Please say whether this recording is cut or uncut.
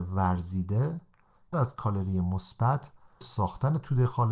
cut